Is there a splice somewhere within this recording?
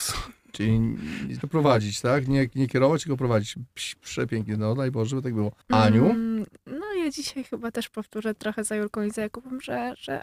yes; 2 cuts; at 1.4 s, 5.6 s

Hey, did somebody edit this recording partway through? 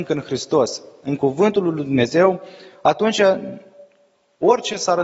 no; 0 cuts

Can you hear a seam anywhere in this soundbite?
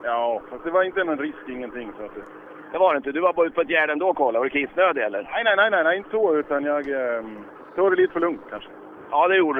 no; 0 cuts

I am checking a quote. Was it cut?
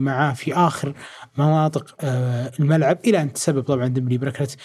no; 0 cuts

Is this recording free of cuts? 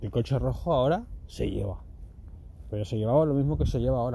yes; 0 cuts

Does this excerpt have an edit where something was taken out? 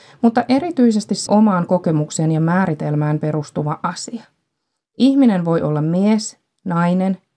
yes; 1 cut; at 1.3 s

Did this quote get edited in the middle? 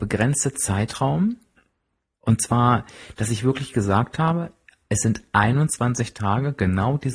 no; 0 cuts

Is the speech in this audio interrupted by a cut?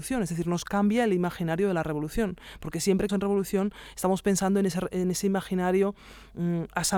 yes; 1 cut; at 3.1 s

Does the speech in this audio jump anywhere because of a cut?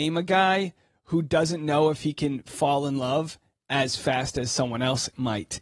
no; 0 cuts

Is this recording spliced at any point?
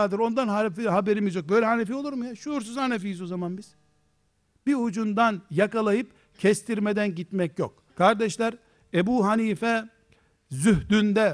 yes; 1 cut; at 7.9 s

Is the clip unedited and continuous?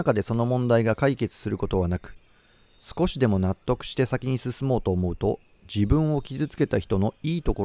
yes; 0 cuts

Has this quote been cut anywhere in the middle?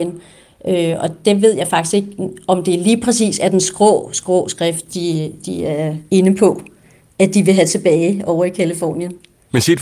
yes; 1 cut; at 6.1 s

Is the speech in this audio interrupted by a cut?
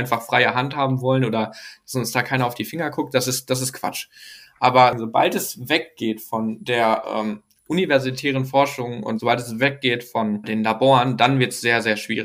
yes; 1 cut; at 10.4 s

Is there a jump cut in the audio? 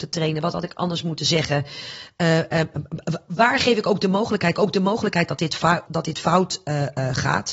yes; 2 cuts; at 4.5 s, 5.9 s

